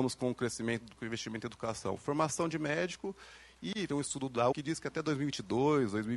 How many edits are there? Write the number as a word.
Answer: three